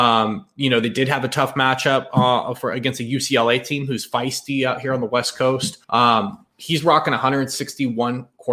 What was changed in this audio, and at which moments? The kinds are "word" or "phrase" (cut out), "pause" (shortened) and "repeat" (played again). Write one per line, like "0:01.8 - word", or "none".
0:05.8 - pause